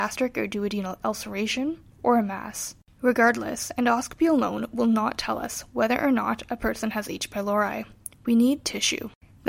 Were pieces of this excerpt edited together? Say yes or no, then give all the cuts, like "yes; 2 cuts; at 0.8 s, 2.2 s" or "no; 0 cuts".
no; 0 cuts